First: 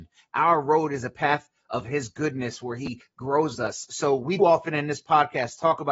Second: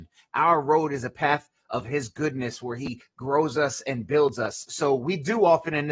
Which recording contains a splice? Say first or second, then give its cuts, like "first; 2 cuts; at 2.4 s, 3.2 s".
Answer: first; 2 cuts; at 3.5 s, 4.4 s